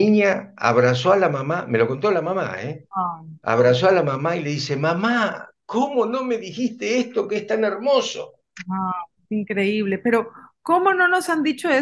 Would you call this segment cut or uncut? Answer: uncut